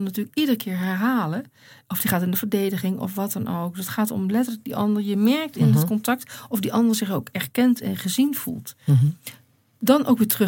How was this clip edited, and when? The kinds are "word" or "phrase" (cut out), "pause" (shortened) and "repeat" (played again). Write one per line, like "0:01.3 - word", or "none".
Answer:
none